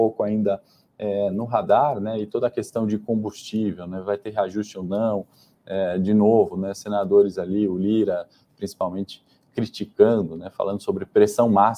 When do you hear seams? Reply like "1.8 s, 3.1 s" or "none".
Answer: none